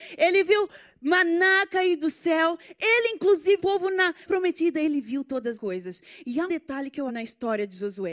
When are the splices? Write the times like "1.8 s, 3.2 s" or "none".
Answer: 3.6 s, 4.3 s, 5.5 s, 6.5 s, 7.1 s